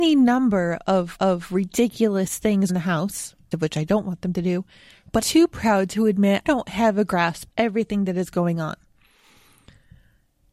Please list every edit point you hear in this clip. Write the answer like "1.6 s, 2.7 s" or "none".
1.1 s, 2.7 s, 3.5 s, 5.2 s, 6.4 s, 7.5 s